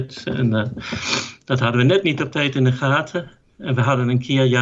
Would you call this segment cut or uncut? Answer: uncut